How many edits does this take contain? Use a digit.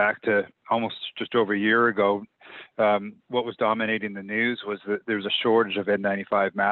1